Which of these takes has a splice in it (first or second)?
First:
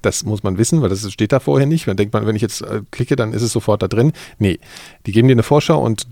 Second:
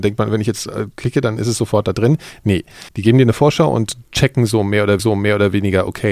second